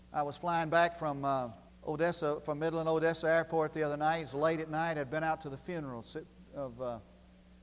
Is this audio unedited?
no; 1 cut; at 1.7 s

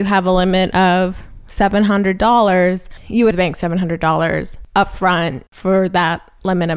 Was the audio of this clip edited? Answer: yes; 1 cut; at 3.3 s

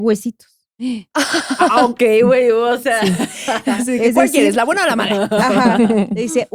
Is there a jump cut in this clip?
no; 0 cuts

